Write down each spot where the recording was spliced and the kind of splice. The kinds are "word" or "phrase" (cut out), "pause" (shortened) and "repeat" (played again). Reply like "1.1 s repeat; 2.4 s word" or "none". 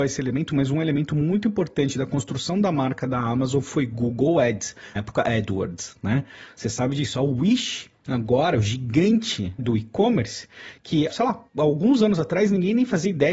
5.0 s word; 9.6 s word; 11.1 s word; 11.5 s pause